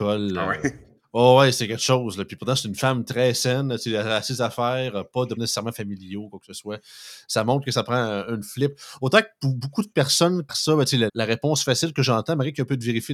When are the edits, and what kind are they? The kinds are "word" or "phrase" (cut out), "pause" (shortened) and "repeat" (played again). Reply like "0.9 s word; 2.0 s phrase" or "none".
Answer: 5.4 s word; 10.5 s word; 11.1 s word